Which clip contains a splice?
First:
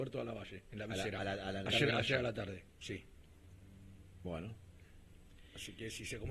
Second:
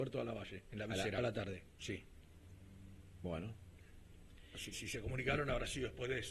second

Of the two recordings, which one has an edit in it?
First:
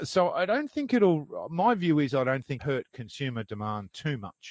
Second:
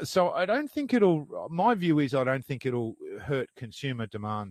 first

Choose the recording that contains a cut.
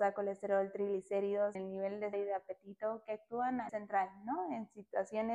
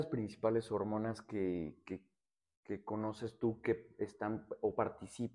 first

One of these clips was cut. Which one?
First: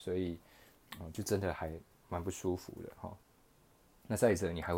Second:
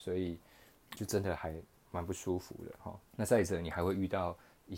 second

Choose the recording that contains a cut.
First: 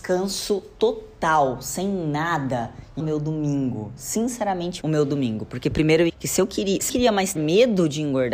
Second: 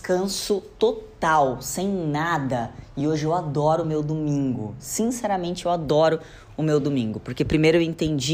first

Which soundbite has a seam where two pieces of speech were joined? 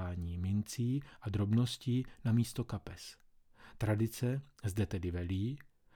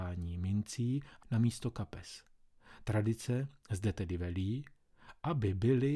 second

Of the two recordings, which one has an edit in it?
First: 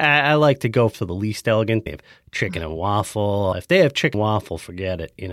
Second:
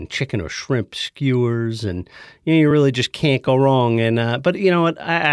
first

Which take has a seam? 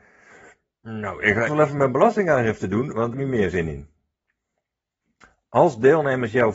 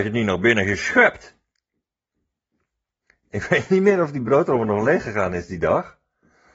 first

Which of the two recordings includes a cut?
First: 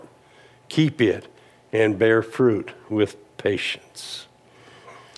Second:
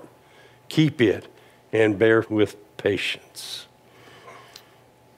second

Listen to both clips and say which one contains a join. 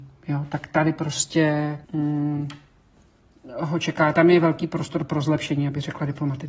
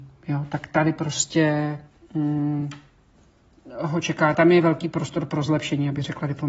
first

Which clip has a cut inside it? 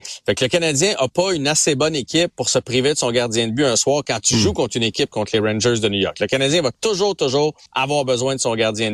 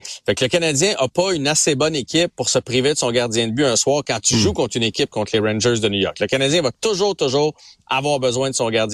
first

